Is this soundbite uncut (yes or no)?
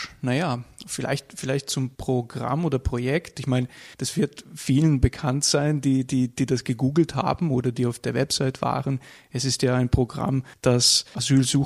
no